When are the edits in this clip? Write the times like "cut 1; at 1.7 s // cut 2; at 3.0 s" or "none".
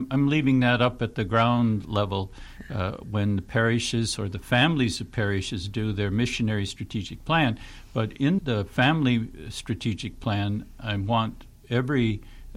cut 1; at 8.4 s